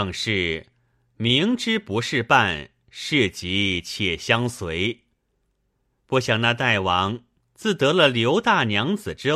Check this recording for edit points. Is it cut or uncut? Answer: uncut